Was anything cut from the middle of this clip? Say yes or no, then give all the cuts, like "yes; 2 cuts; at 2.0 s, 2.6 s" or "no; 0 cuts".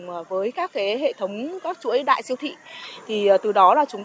no; 0 cuts